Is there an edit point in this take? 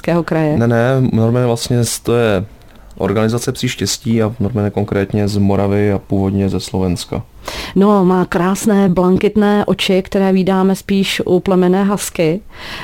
no; 0 cuts

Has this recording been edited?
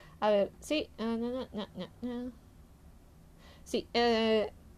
no; 0 cuts

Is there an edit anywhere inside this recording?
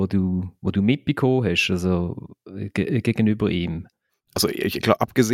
no; 0 cuts

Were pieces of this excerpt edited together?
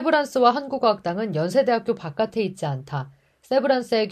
no; 0 cuts

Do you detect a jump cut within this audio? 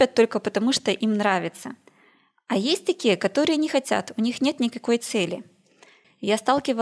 no; 0 cuts

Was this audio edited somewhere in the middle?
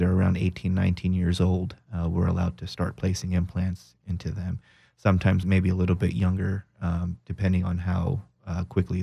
no; 0 cuts

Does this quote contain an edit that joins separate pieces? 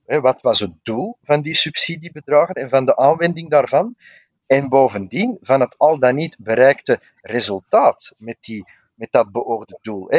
no; 0 cuts

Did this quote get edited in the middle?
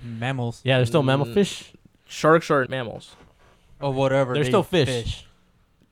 yes; 1 cut; at 2.7 s

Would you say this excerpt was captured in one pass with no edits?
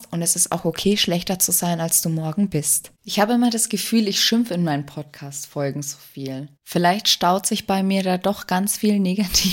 no; 2 cuts; at 2.9 s, 6.6 s

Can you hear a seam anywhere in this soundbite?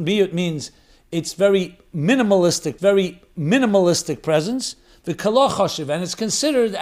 yes; 1 cut; at 2.8 s

